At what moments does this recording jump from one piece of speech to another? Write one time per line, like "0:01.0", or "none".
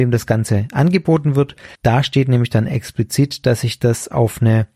0:01.7

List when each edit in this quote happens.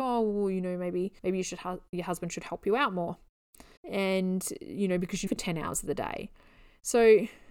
0:01.2
0:03.8
0:05.3

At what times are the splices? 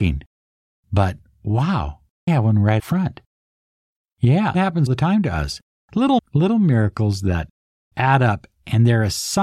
0:02.3
0:02.8
0:04.5
0:04.9
0:06.2
0:07.9

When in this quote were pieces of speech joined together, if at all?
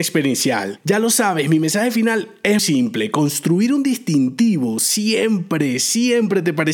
0:02.6

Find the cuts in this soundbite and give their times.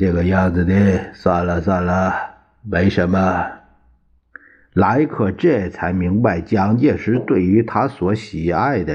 none

